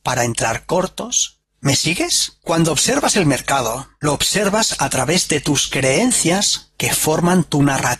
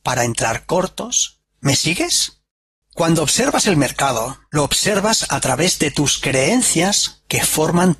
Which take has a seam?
first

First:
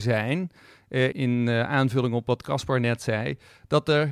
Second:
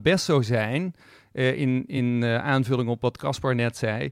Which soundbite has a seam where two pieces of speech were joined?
first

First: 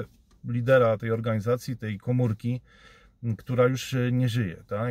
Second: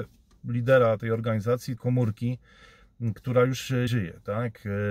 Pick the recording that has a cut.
second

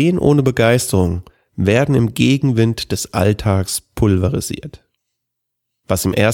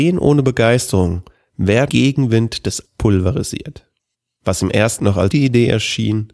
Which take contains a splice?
second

